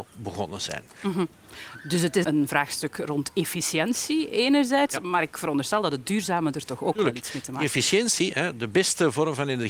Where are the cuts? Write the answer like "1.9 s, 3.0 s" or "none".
2.2 s